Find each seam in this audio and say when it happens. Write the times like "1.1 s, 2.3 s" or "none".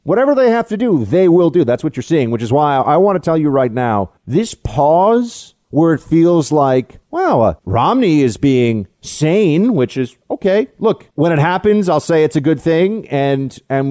4.2 s, 5.6 s, 7.0 s, 7.6 s, 10.2 s, 11.1 s